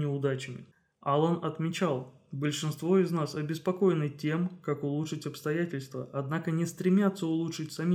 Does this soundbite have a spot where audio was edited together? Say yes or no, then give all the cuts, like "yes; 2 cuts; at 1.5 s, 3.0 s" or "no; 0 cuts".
no; 0 cuts